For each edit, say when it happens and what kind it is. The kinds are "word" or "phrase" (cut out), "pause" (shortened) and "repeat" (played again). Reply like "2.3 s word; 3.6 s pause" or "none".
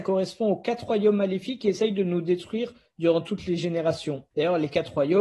4.3 s pause